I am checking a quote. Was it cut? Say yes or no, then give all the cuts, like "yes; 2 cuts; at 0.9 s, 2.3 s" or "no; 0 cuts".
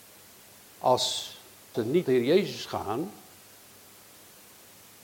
yes; 2 cuts; at 1.7 s, 2.1 s